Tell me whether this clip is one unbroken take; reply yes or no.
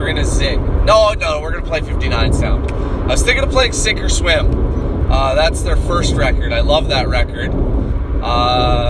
yes